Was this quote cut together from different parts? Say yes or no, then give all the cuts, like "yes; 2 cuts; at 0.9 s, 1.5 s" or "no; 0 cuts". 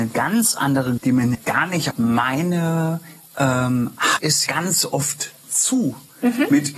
yes; 5 cuts; at 1.0 s, 1.3 s, 1.9 s, 4.2 s, 4.5 s